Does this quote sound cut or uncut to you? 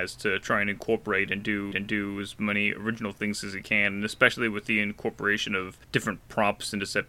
cut